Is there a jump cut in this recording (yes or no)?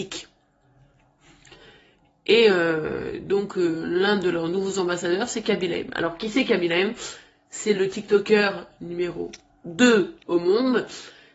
no